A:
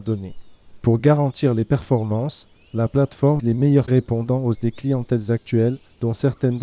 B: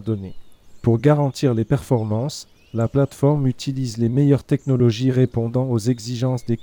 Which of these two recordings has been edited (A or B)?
A